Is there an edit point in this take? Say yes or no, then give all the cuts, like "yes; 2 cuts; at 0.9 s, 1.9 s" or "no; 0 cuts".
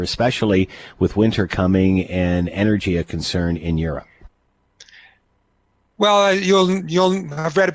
no; 0 cuts